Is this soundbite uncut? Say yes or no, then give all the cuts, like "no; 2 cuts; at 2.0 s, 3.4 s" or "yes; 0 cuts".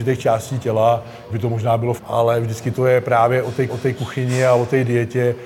no; 3 cuts; at 1.3 s, 2.0 s, 3.7 s